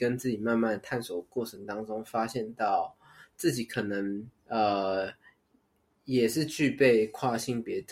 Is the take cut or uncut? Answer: cut